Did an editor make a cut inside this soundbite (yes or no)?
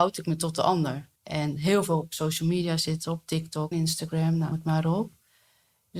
yes